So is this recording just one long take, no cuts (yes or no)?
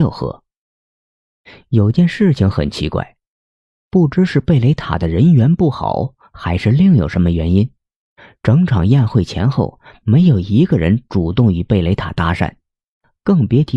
yes